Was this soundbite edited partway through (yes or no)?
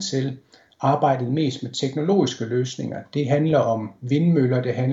no